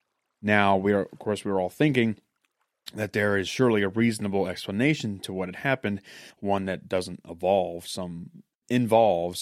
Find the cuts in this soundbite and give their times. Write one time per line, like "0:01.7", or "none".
0:06.3